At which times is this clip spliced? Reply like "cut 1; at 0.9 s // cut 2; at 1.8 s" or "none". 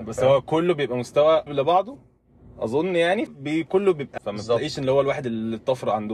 cut 1; at 1.5 s // cut 2; at 3.3 s // cut 3; at 4.2 s